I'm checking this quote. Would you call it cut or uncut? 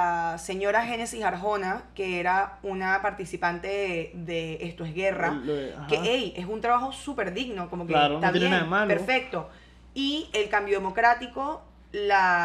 uncut